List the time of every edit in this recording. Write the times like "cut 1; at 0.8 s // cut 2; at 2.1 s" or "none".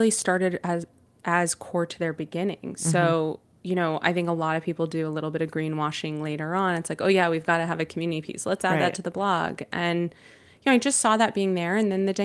none